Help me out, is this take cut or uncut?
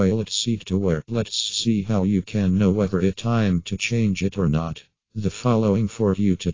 cut